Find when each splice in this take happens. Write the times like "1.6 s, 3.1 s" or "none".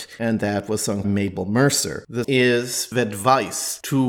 1.0 s, 2.2 s, 2.9 s